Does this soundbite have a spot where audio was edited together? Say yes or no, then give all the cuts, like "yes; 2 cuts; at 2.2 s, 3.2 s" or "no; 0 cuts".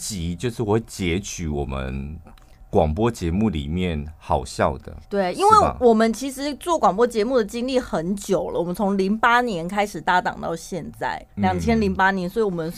yes; 2 cuts; at 5.0 s, 11.3 s